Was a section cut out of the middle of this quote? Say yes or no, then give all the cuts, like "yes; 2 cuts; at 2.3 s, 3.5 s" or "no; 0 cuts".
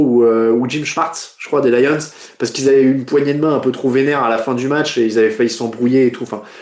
no; 0 cuts